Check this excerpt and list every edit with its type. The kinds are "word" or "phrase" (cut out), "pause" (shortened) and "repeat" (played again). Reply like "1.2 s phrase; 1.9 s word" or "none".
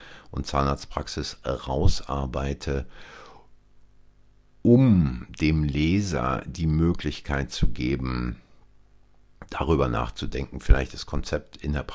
none